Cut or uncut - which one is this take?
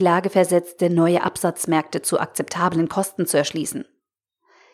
uncut